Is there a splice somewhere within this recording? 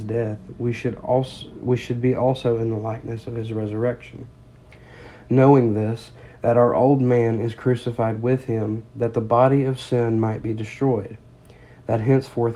no; 0 cuts

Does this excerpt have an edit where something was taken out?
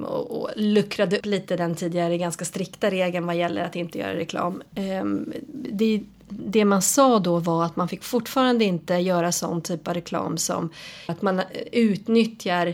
yes; 2 cuts; at 1.2 s, 11.1 s

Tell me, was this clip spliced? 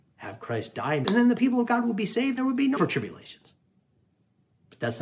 yes; 3 cuts; at 1.0 s, 2.4 s, 2.8 s

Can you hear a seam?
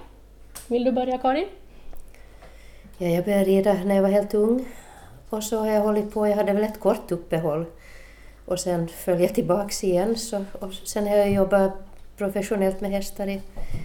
no; 0 cuts

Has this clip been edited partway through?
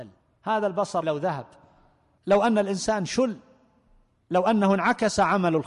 yes; 1 cut; at 1.0 s

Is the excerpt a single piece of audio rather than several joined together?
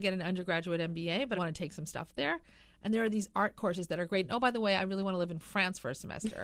no; 1 cut; at 1.3 s

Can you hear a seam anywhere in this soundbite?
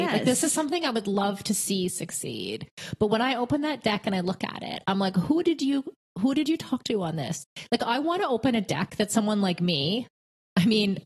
no; 0 cuts

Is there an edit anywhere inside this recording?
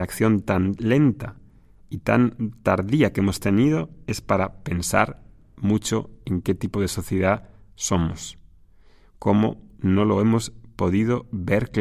no; 0 cuts

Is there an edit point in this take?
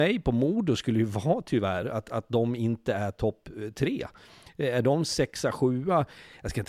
no; 0 cuts

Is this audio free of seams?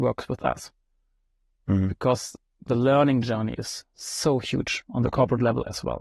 yes; 0 cuts

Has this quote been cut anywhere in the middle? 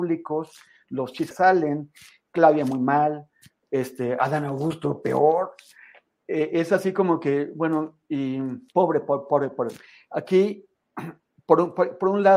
yes; 2 cuts; at 1.3 s, 8.7 s

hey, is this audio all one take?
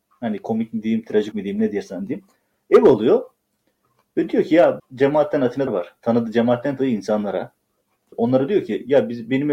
no; 5 cuts; at 1.3 s, 4.8 s, 5.7 s, 6.8 s, 8.1 s

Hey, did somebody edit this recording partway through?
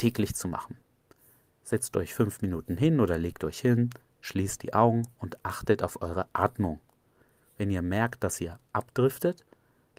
no; 0 cuts

